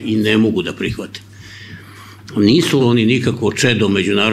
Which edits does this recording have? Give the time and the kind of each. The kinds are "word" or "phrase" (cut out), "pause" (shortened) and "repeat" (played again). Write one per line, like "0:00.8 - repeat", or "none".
0:02.8 - phrase